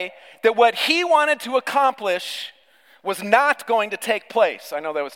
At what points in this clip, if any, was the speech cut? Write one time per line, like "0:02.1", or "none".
none